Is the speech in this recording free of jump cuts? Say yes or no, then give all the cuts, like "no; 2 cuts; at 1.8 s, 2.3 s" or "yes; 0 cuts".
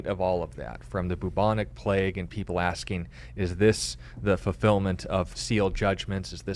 no; 1 cut; at 5.3 s